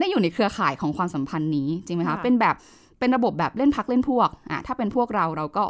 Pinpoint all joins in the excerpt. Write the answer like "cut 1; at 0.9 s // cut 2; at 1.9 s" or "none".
none